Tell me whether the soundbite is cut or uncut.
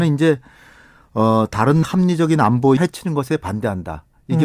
cut